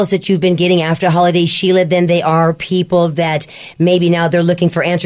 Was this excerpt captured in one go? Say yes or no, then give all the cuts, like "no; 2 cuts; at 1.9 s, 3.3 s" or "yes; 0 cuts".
yes; 0 cuts